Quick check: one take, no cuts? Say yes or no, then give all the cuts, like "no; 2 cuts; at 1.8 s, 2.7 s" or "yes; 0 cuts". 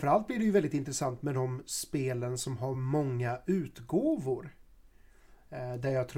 yes; 0 cuts